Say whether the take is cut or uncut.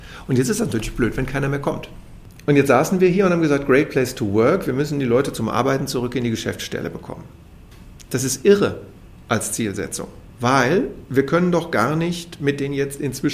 uncut